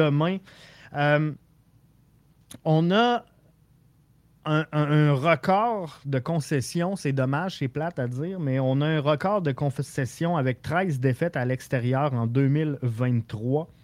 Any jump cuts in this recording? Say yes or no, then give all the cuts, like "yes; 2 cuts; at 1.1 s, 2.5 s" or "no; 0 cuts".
no; 0 cuts